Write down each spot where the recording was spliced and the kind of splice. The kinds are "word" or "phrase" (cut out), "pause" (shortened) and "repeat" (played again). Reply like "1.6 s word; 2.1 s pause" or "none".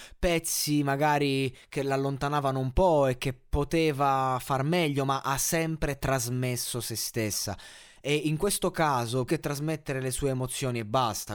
9.3 s word

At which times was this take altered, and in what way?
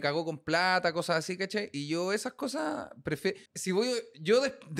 3.5 s pause

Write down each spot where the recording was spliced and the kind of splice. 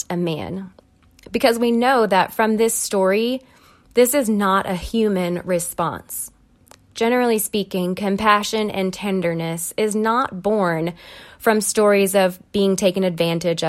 none

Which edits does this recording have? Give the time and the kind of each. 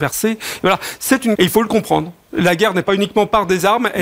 1.4 s word

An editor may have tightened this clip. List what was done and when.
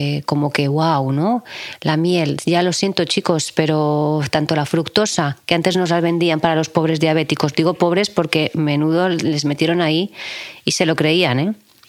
none

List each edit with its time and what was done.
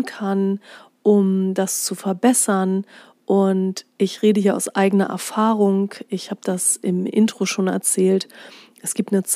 none

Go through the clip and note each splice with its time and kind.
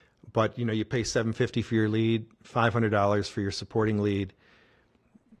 none

